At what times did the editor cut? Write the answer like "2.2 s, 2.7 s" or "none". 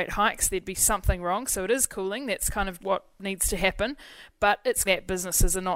2.8 s, 4.9 s